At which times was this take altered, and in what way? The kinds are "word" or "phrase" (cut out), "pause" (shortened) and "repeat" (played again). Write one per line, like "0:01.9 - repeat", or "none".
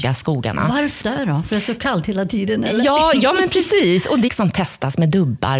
0:01.0 - word
0:04.3 - phrase